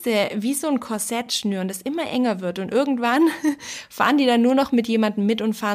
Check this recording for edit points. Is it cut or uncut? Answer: uncut